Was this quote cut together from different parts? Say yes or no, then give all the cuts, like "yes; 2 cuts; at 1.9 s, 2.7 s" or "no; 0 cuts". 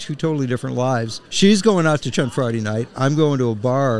yes; 2 cuts; at 1.3 s, 2.1 s